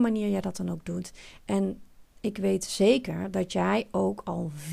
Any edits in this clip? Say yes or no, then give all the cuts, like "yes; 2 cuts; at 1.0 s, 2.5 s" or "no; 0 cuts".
no; 0 cuts